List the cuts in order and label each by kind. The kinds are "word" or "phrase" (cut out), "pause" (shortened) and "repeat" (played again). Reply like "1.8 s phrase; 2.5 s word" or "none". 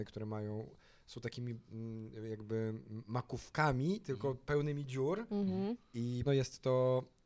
6.3 s word